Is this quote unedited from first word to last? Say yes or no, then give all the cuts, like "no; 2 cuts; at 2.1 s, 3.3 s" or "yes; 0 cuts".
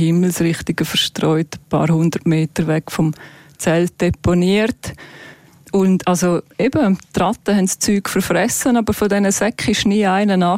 yes; 0 cuts